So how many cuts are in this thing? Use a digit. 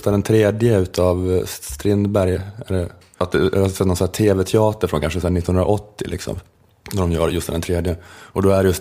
0